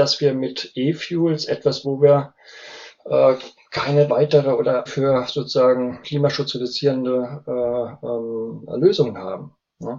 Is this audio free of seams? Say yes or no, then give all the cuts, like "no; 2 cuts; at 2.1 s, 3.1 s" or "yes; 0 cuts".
no; 4 cuts; at 1.8 s, 4.1 s, 4.9 s, 6.0 s